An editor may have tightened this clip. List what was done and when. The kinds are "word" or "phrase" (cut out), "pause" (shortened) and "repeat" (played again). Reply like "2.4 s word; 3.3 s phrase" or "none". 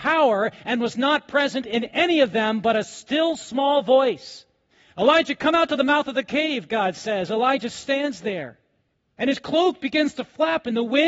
none